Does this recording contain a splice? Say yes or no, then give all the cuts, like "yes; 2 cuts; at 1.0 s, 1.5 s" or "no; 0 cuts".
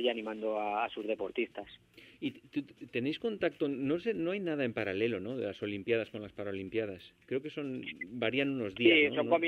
yes; 1 cut; at 7.2 s